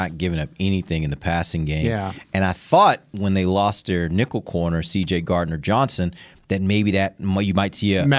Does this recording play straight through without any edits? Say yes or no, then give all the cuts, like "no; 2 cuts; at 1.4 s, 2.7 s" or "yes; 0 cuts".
yes; 0 cuts